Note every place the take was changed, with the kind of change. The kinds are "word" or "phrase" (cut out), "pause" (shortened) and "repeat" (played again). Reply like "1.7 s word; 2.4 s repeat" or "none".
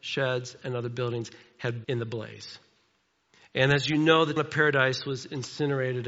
1.8 s word; 4.4 s word